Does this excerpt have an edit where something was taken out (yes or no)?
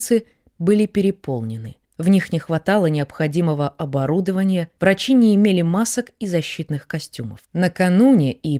yes